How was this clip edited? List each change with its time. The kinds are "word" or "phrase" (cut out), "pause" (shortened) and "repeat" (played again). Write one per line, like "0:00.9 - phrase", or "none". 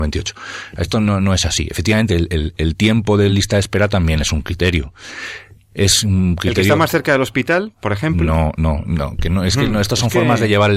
none